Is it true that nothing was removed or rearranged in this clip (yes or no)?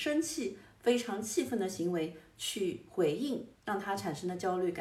no